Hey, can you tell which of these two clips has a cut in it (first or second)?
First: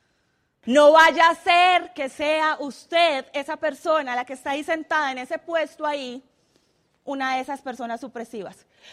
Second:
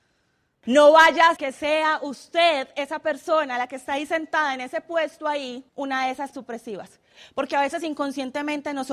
second